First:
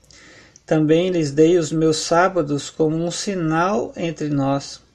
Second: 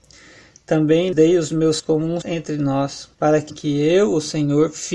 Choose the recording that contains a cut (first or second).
second